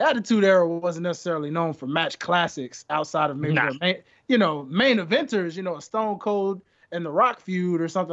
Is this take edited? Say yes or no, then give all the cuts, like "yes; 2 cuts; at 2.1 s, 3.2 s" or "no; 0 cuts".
no; 0 cuts